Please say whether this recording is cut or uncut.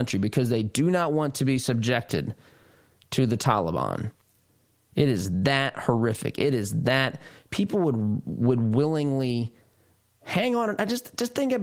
uncut